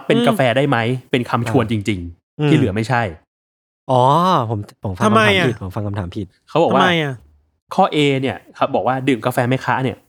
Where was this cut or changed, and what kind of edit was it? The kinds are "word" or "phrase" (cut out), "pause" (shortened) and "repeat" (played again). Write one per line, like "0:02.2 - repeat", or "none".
none